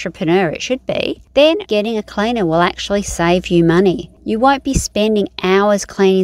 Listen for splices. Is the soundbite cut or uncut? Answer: cut